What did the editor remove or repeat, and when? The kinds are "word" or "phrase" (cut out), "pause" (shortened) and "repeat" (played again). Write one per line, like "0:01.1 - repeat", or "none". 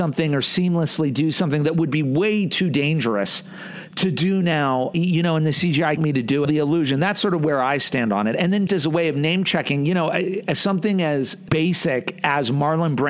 0:06.0 - phrase
0:06.4 - phrase
0:08.7 - word